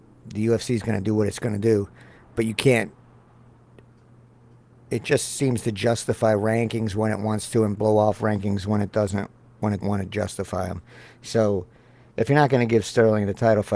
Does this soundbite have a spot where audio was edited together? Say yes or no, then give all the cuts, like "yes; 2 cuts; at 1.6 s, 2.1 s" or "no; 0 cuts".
yes; 1 cut; at 9.8 s